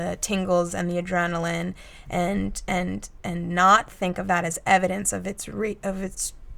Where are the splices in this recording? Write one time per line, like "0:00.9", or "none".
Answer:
none